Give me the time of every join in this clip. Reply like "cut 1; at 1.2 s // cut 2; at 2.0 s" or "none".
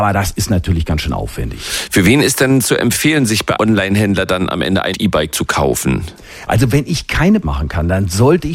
cut 1; at 3.6 s // cut 2; at 4.9 s // cut 3; at 7.4 s